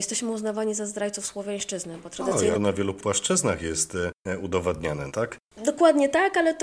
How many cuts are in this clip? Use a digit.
2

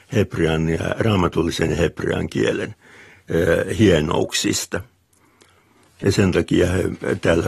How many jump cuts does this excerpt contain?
0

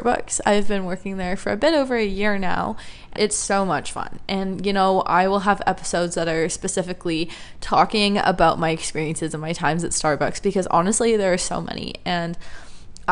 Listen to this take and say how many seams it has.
1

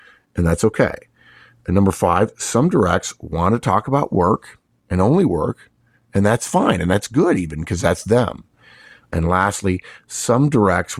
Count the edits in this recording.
0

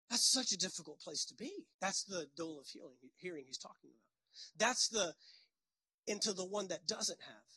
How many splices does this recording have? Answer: 1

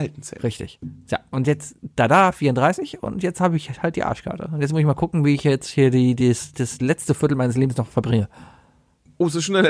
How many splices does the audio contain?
0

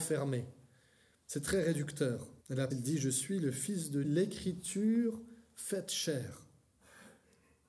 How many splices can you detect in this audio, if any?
3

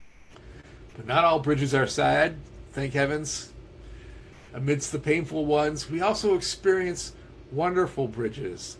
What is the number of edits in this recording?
0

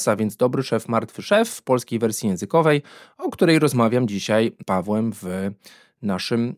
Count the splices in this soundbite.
0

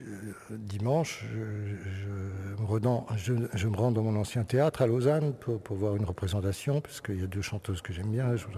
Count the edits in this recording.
0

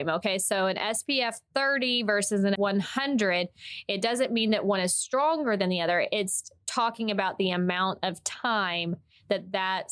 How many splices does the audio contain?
1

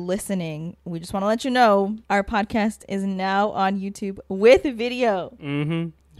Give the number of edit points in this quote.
1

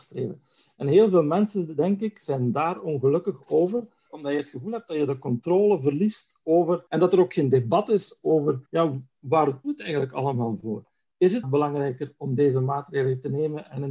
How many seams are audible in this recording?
5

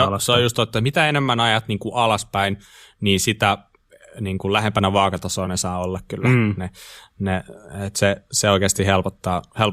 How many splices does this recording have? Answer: 0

